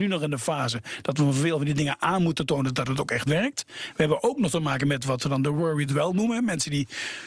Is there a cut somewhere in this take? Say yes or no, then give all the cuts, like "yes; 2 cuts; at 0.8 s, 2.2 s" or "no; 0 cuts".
no; 0 cuts